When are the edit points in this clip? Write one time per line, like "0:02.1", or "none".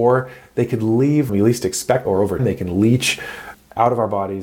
0:01.3
0:02.0
0:02.4
0:03.5